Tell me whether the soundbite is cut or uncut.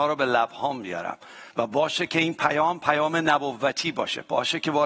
cut